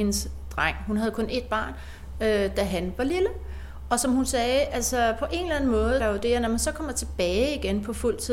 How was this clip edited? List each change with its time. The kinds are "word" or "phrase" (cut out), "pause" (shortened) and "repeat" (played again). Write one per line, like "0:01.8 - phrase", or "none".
0:06.0 - phrase